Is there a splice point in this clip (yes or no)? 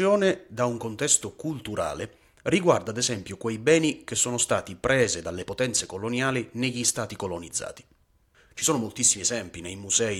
no